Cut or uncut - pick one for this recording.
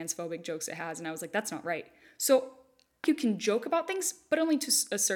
cut